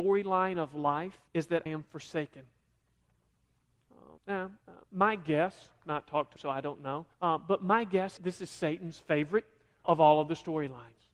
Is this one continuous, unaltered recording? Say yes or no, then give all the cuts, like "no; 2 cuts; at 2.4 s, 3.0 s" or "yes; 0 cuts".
no; 9 cuts; at 1.3 s, 1.7 s, 4.2 s, 4.6 s, 5.8 s, 6.4 s, 7.1 s, 8.2 s, 9.8 s